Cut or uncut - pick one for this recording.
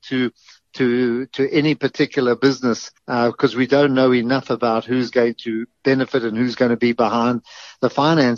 cut